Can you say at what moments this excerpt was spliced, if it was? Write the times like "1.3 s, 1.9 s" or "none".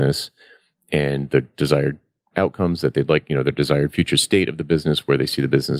none